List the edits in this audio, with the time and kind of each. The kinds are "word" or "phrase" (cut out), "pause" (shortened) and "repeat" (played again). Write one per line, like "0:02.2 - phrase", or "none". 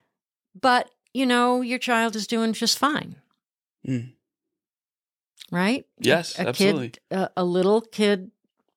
none